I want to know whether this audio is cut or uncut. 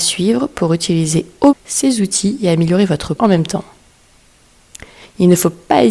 cut